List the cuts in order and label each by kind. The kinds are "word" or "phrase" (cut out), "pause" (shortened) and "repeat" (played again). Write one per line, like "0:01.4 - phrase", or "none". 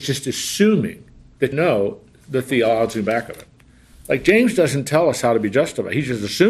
0:01.5 - word